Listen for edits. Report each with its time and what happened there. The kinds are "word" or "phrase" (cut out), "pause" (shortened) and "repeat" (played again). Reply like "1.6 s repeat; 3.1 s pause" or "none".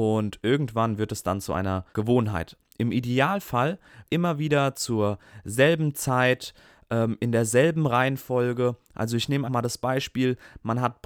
1.9 s pause; 4.1 s phrase; 9.4 s word